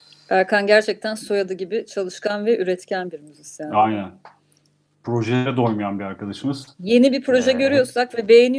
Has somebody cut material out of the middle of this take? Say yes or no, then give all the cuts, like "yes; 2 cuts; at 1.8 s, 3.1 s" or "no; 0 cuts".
no; 0 cuts